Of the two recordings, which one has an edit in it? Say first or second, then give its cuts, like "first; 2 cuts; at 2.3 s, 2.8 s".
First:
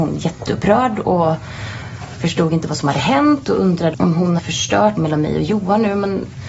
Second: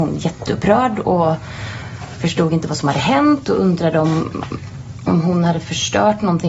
first; 3 cuts; at 3.9 s, 4.4 s, 5.0 s